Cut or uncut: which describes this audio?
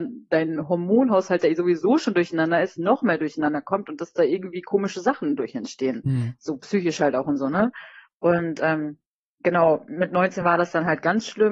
uncut